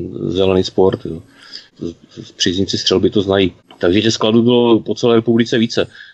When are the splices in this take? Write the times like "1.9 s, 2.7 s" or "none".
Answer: none